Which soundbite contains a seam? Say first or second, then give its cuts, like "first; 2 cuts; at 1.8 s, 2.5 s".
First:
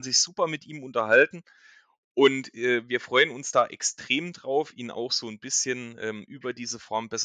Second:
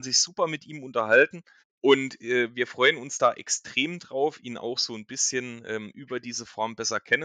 second; 1 cut; at 1.6 s